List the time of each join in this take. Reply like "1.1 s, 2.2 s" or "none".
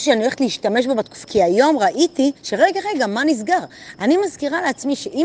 1.2 s, 2.4 s